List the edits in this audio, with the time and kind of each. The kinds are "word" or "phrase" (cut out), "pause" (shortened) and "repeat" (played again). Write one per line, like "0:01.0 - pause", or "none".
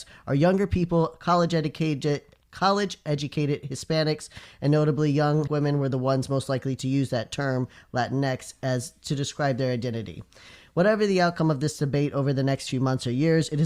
0:05.5 - word